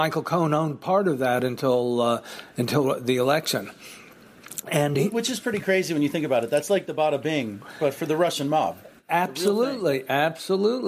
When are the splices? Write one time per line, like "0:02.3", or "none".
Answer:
none